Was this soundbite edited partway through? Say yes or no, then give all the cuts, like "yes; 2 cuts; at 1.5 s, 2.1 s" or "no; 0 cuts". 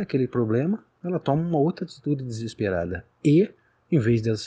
no; 0 cuts